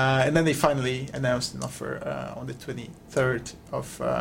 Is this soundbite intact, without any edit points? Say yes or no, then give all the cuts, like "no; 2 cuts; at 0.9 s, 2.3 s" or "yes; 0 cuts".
yes; 0 cuts